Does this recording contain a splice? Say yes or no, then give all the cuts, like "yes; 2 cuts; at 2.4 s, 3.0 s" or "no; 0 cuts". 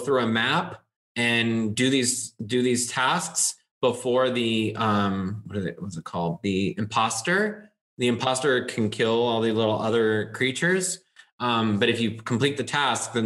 no; 0 cuts